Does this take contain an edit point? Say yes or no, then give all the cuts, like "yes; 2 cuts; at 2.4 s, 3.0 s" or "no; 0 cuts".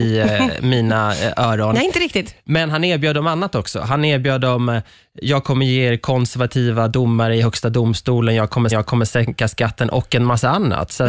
yes; 1 cut; at 8.7 s